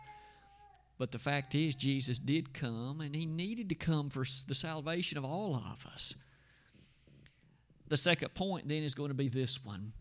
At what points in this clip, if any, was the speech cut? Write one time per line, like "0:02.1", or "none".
none